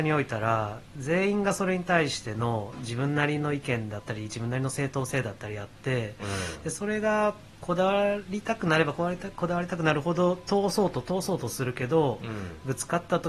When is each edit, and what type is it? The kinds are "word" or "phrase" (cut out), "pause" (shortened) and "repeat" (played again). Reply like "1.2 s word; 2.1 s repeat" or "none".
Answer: 7.5 s pause